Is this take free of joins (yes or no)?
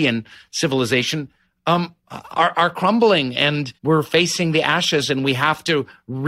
no